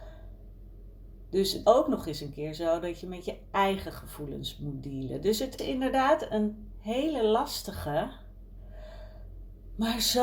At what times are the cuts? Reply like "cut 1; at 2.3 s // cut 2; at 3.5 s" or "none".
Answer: cut 1; at 1.6 s // cut 2; at 5.6 s

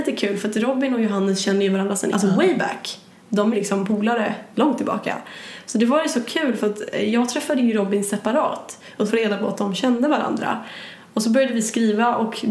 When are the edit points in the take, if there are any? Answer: cut 1; at 2.1 s // cut 2; at 3.5 s // cut 3; at 4.5 s // cut 4; at 9.1 s

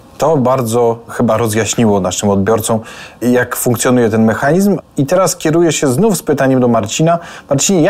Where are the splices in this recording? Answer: none

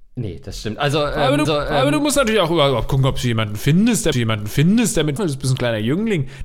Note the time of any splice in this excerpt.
cut 1; at 1.5 s // cut 2; at 4.1 s // cut 3; at 5.2 s

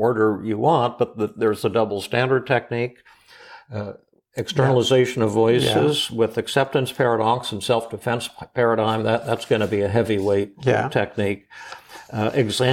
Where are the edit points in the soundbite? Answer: none

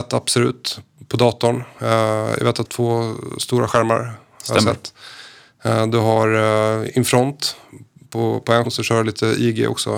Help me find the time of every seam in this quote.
cut 1; at 2.6 s // cut 2; at 8.7 s

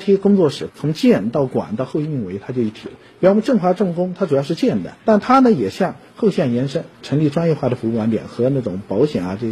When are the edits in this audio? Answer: cut 1; at 5.0 s // cut 2; at 6.9 s

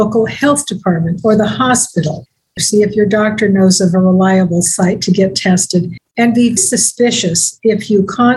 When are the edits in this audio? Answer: cut 1; at 6.6 s

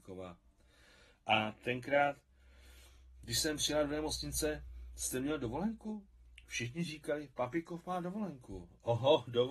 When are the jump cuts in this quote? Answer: none

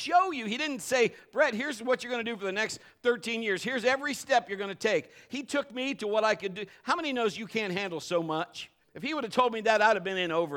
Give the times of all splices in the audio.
cut 1; at 8.8 s

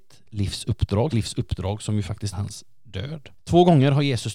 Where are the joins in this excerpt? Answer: cut 1; at 1.1 s // cut 2; at 2.3 s // cut 3; at 3.4 s

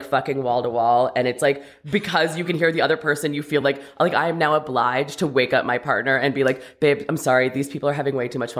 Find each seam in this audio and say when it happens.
none

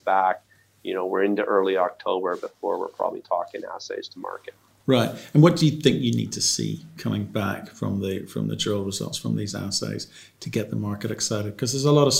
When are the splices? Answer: none

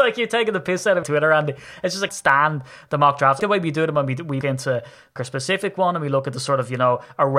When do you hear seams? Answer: cut 1; at 1.0 s // cut 2; at 2.1 s // cut 3; at 3.4 s // cut 4; at 4.4 s // cut 5; at 5.2 s

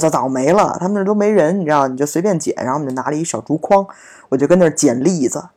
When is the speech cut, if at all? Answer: none

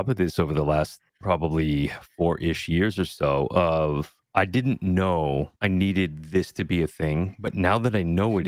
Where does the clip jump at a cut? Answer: cut 1; at 4.2 s // cut 2; at 5.6 s

